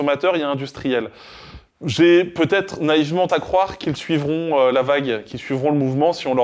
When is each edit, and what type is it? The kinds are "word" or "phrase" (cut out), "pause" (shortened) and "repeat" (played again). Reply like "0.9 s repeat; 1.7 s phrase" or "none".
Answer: 1.7 s pause; 3.3 s word